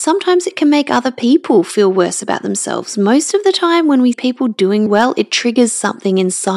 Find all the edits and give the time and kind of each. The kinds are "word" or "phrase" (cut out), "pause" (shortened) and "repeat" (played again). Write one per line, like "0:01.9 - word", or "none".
0:04.1 - word
0:04.9 - word